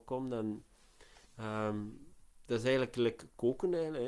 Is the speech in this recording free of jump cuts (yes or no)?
no